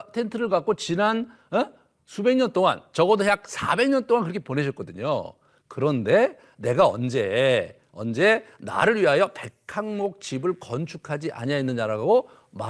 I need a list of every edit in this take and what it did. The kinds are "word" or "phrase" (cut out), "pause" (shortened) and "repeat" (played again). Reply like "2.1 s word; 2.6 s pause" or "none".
none